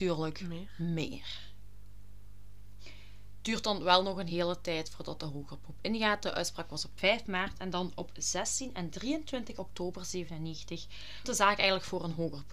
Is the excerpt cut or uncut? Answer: cut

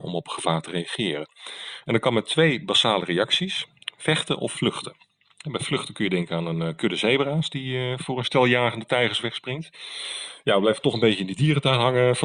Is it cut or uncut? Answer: uncut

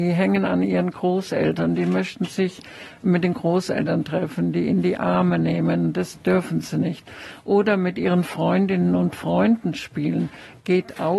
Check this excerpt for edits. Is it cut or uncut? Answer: uncut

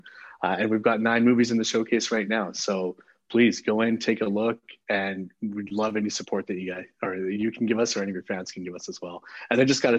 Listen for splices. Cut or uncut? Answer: uncut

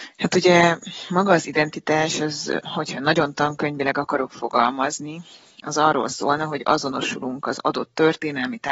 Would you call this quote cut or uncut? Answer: uncut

